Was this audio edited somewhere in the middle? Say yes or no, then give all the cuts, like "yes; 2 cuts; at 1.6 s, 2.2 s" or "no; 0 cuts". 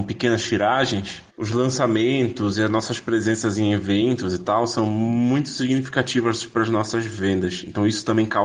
yes; 1 cut; at 1.3 s